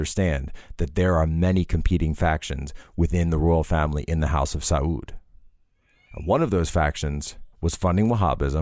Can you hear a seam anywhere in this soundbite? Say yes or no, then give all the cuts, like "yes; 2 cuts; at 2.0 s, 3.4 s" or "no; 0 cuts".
yes; 1 cut; at 7.5 s